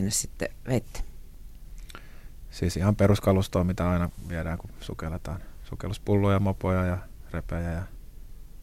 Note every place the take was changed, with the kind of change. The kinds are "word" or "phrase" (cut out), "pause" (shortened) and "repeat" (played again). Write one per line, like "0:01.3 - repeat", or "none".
none